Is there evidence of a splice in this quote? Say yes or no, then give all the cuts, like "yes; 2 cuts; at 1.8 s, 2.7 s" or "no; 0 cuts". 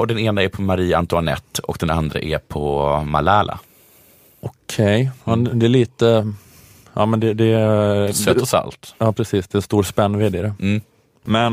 no; 0 cuts